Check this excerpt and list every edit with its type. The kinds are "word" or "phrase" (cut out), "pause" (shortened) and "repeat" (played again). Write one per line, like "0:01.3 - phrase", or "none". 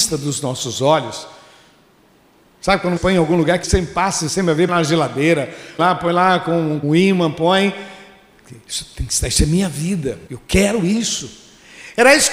0:03.0 - word
0:03.6 - word
0:04.3 - word
0:04.7 - word
0:05.8 - word
0:06.8 - word
0:10.3 - word

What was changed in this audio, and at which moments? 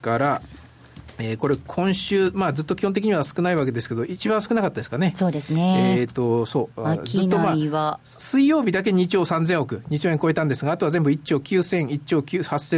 none

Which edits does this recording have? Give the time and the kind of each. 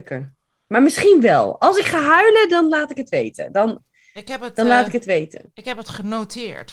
none

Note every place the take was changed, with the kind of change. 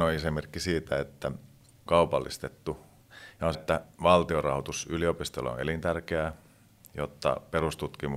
0:01.9 - phrase
0:03.5 - word

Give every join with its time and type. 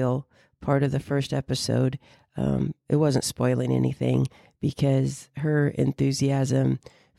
none

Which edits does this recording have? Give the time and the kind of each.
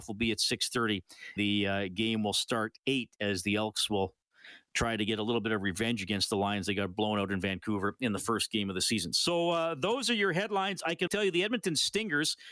0:01.4 - word
0:02.8 - word
0:11.1 - word

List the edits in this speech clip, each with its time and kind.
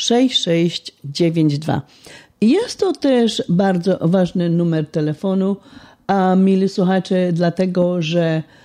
none

